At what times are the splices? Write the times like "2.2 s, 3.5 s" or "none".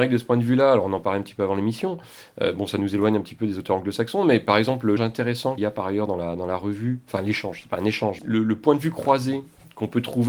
5.0 s, 5.6 s, 8.2 s